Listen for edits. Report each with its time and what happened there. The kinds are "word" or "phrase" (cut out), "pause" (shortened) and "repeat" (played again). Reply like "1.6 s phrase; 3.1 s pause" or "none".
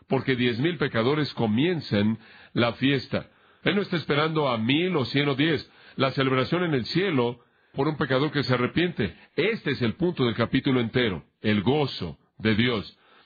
7.7 s phrase